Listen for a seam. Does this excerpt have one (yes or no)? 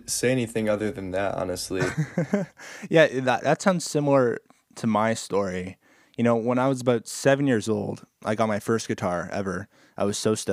no